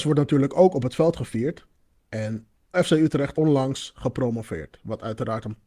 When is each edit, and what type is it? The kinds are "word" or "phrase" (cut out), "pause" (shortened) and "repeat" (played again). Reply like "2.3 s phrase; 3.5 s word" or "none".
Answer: 2.7 s word; 3.3 s word

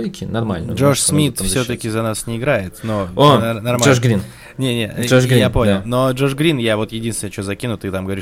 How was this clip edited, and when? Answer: none

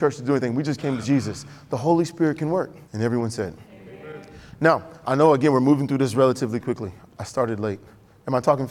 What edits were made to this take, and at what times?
1.0 s word; 2.8 s pause; 3.7 s pause

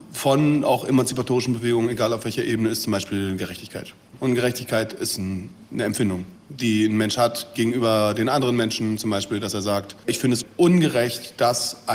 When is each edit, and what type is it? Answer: 6.4 s pause

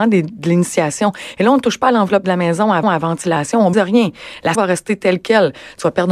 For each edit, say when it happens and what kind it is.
2.8 s repeat; 3.7 s word; 4.5 s word

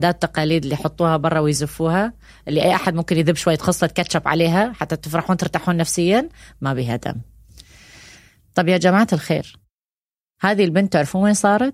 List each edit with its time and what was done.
none

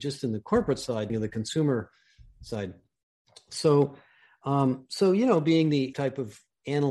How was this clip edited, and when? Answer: 1.1 s phrase; 5.9 s word

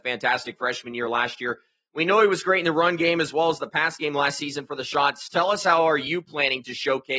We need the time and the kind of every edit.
none

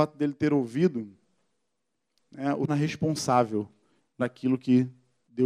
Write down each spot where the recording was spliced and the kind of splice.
2.7 s word; 4.2 s word

